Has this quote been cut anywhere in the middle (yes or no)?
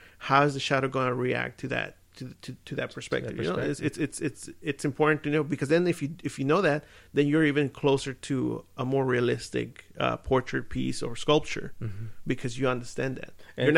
no